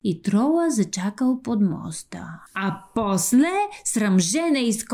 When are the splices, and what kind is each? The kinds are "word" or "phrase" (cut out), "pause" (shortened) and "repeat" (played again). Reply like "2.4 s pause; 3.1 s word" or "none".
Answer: 2.5 s pause